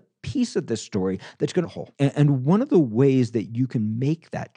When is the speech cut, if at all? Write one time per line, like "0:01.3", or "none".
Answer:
0:01.6
0:01.9